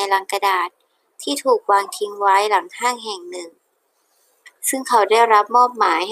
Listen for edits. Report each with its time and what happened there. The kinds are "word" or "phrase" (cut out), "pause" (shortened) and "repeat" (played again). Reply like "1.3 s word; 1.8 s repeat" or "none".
none